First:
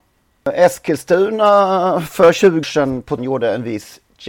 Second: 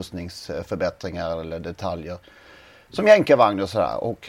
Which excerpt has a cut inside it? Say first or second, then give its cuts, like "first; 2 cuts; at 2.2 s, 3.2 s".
first; 2 cuts; at 2.6 s, 3.2 s